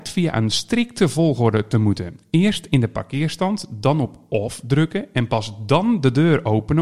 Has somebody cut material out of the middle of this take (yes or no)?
no